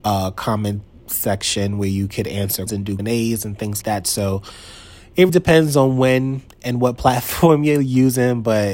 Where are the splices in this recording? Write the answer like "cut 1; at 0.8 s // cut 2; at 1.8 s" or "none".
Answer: cut 1; at 2.7 s // cut 2; at 3.0 s // cut 3; at 3.8 s // cut 4; at 5.3 s